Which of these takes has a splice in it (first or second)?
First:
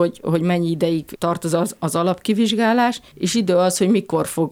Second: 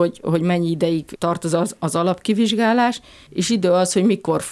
first